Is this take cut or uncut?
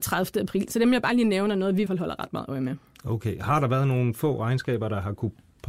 cut